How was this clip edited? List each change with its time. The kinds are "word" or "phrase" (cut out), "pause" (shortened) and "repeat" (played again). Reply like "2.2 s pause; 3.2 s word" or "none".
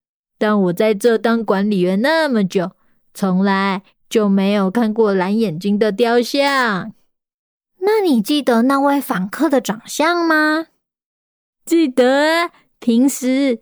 none